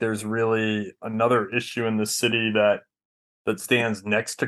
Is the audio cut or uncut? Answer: uncut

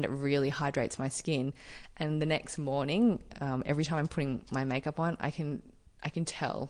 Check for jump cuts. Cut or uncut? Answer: uncut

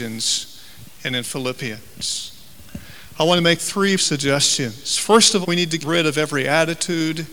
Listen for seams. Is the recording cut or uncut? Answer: cut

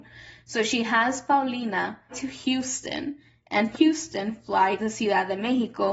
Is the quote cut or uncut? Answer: cut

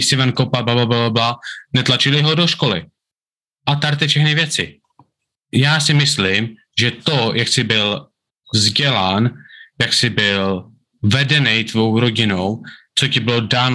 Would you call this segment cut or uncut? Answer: uncut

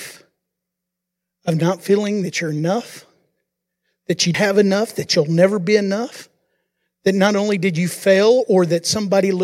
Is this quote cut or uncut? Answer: cut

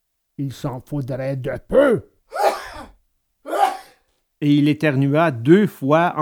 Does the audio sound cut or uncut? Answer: uncut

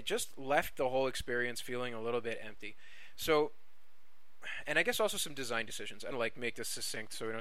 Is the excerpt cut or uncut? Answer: cut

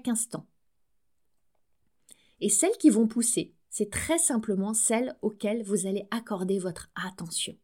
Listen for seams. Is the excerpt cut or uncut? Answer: cut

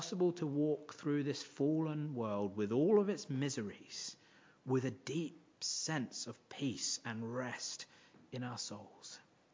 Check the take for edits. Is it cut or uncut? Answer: uncut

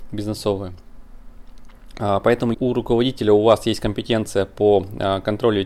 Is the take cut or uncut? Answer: cut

